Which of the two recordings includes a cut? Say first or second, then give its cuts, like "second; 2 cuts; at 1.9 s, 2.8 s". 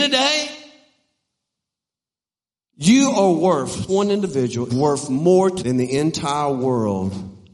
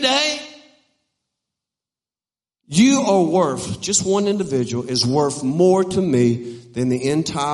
first; 3 cuts; at 3.9 s, 4.7 s, 5.6 s